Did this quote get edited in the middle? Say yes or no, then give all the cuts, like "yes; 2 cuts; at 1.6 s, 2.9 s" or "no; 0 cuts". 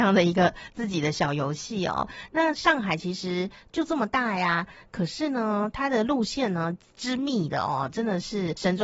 no; 0 cuts